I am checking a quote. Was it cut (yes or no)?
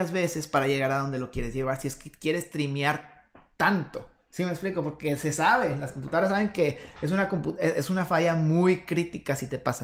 no